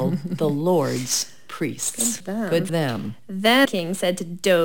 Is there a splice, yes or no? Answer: yes